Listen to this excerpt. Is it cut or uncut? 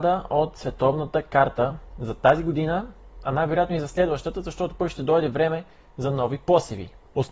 uncut